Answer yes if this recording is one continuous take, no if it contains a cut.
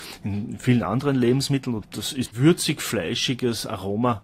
no